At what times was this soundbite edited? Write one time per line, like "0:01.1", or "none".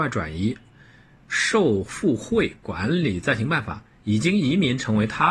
none